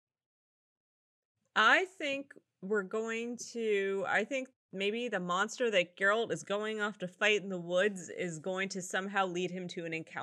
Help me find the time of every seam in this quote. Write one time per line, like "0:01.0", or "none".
none

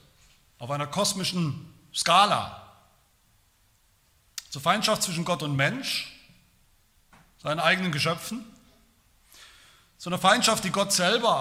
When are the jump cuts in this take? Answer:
none

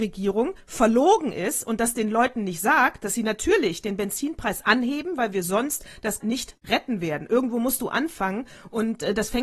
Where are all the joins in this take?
0:06.2

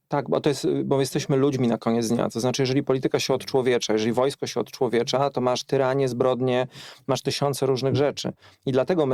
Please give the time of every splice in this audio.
none

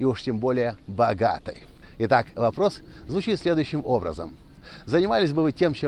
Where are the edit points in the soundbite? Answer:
0:01.8

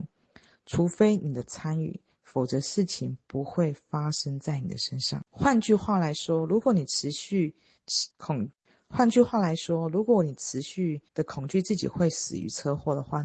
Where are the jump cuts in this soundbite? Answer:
0:05.3
0:08.1
0:11.1

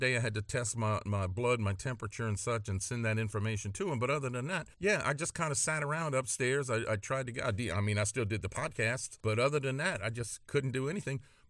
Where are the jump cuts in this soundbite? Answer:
0:04.7
0:09.2

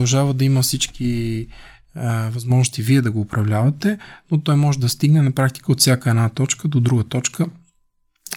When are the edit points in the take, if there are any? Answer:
none

